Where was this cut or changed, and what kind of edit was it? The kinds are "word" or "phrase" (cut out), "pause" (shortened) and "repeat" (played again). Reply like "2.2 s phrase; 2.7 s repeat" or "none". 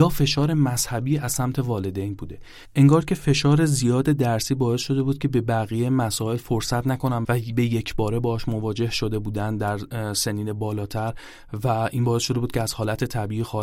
7.2 s word